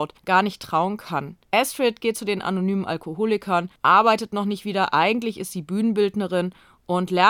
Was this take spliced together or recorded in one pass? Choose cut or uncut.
cut